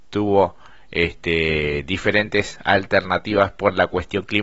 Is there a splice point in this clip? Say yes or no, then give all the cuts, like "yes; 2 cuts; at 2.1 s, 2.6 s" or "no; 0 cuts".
no; 0 cuts